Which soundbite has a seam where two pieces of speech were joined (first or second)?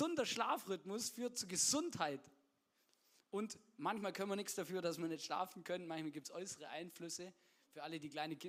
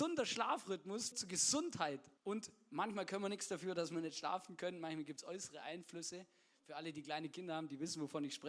second